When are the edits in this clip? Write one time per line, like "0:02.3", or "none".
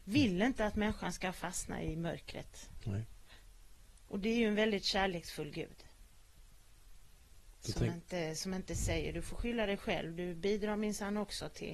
none